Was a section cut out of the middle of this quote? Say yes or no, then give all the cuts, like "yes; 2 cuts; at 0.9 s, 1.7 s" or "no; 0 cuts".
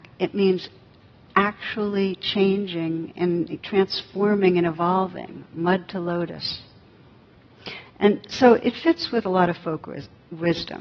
no; 0 cuts